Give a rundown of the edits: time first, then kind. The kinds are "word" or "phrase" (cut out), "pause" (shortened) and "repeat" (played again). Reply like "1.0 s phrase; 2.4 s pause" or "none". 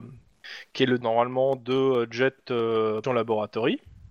1.0 s word; 3.0 s word